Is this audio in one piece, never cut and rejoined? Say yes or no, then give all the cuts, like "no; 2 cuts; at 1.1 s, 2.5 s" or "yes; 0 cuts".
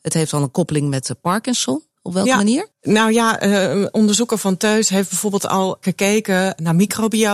no; 1 cut; at 2.7 s